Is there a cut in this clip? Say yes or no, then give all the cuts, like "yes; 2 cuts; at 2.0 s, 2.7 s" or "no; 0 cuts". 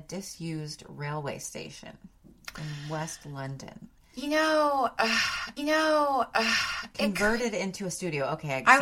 yes; 1 cut; at 5.6 s